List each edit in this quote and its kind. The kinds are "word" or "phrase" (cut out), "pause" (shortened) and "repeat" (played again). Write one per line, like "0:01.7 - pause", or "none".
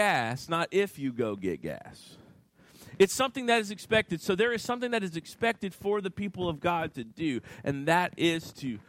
none